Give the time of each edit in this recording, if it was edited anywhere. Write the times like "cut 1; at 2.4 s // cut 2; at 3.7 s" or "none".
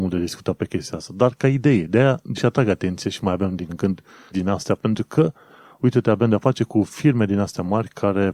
cut 1; at 2.3 s // cut 2; at 3.7 s // cut 3; at 4.3 s